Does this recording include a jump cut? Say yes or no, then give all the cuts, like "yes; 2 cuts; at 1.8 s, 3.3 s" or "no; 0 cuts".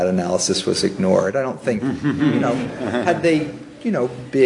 no; 0 cuts